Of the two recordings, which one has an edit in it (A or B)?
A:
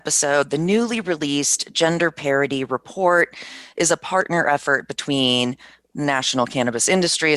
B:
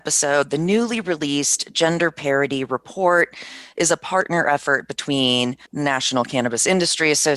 B